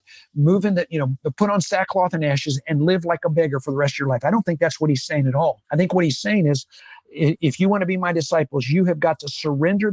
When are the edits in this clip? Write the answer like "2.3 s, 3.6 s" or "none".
5.6 s